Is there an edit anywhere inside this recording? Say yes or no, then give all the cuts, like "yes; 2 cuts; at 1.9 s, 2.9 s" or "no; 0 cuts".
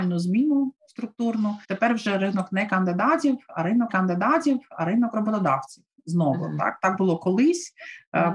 yes; 2 cuts; at 1.6 s, 3.9 s